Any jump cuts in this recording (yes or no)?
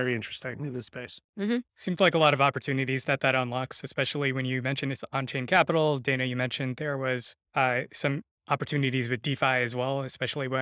yes